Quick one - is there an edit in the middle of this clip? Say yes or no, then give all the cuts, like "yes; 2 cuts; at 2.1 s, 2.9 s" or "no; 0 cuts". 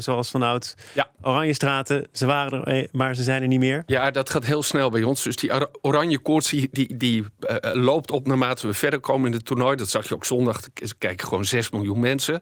no; 0 cuts